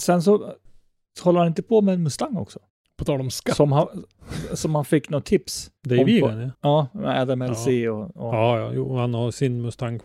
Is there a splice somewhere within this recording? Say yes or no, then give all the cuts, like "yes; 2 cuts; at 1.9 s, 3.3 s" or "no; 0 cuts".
yes; 3 cuts; at 2.7 s, 5.8 s, 6.5 s